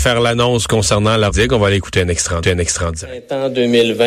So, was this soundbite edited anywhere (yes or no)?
yes